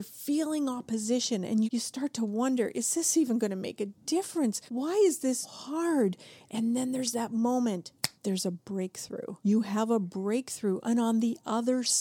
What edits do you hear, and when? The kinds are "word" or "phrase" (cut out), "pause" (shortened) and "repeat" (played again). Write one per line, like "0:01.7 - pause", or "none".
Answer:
0:01.7 - word
0:04.7 - pause
0:05.4 - word
0:08.2 - pause
0:09.4 - pause